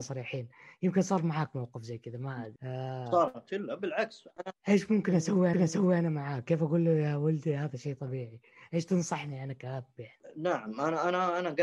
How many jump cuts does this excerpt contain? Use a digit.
2